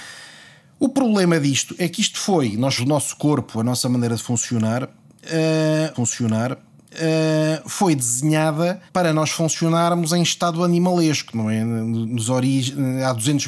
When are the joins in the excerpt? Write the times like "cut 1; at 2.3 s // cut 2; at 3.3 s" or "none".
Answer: cut 1; at 2.8 s // cut 2; at 5.9 s // cut 3; at 8.9 s